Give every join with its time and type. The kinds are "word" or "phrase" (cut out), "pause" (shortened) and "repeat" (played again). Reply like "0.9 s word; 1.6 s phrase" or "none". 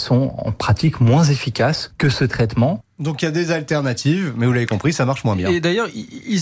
none